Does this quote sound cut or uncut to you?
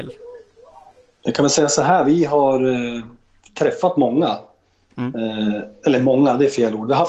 uncut